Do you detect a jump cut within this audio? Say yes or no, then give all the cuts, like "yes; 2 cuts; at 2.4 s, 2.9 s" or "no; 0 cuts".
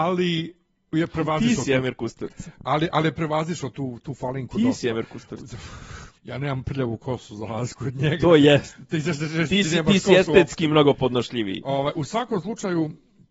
yes; 1 cut; at 6.2 s